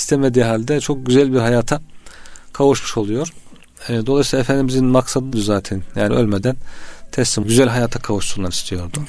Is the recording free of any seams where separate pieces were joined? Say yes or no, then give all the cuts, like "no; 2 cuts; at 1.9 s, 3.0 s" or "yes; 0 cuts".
no; 3 cuts; at 5.3 s, 6.1 s, 7.4 s